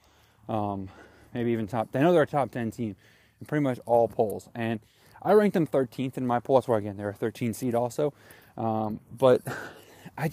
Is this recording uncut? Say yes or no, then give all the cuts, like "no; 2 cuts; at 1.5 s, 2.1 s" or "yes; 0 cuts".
yes; 0 cuts